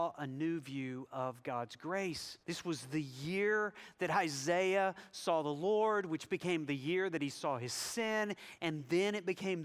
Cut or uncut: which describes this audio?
cut